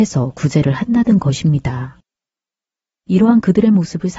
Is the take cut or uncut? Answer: uncut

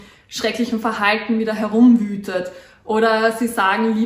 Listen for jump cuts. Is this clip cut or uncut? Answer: uncut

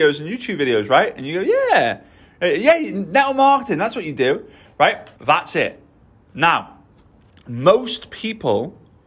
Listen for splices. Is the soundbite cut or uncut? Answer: cut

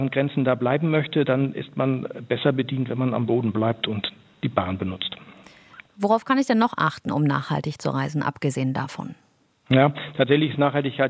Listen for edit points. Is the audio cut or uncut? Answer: uncut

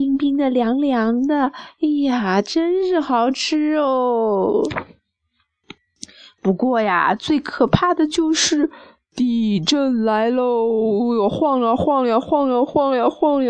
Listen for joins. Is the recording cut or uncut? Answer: uncut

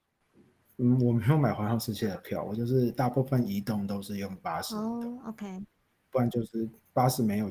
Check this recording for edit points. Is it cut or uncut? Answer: uncut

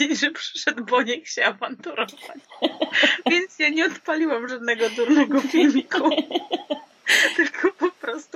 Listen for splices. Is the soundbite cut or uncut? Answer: uncut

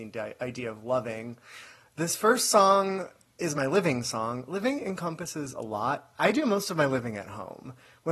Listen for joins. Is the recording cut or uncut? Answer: uncut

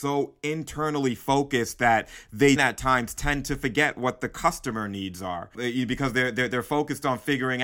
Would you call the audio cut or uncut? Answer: cut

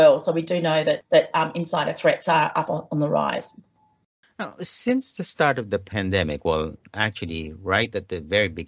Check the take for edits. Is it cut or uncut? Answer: uncut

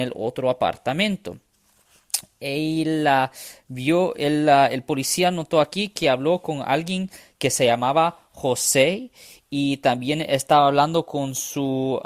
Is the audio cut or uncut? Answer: uncut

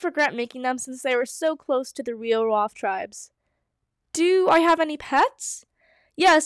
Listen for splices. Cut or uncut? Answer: uncut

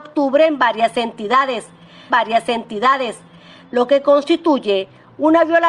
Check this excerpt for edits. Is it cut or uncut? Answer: cut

